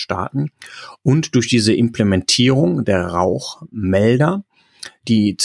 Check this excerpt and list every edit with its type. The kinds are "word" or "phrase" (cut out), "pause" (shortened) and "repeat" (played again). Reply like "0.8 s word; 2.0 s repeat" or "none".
none